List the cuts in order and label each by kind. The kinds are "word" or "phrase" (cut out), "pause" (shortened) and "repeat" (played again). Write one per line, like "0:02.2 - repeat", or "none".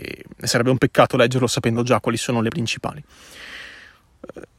0:02.5 - word